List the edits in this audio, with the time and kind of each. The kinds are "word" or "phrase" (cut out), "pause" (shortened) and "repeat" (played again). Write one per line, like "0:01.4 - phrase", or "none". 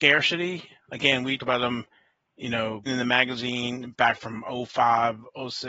0:01.4 - word
0:02.9 - word

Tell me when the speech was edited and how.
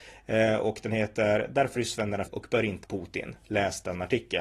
0:01.8 - word
0:02.3 - word
0:02.8 - word

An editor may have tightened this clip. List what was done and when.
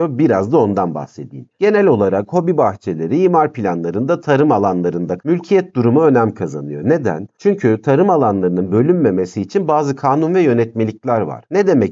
0:05.2 - word

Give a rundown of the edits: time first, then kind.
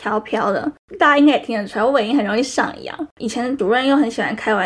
0:03.1 - pause

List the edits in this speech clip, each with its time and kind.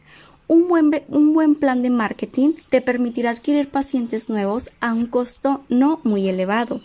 0:02.6 - pause

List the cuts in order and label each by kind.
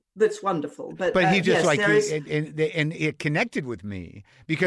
none

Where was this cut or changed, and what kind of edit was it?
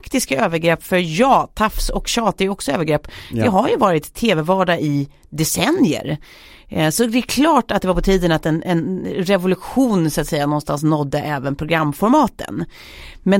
none

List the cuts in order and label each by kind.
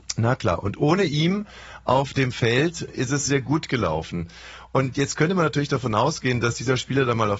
0:02.9 - word
0:03.3 - word

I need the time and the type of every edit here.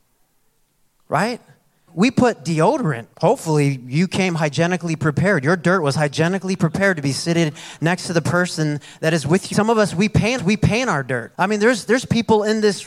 0:01.9 - word
0:03.1 - pause
0:09.5 - phrase
0:10.4 - repeat
0:11.3 - pause

